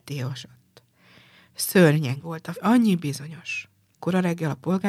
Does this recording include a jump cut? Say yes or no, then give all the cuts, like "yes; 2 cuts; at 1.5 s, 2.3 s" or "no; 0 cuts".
yes; 3 cuts; at 2.2 s, 2.5 s, 4.0 s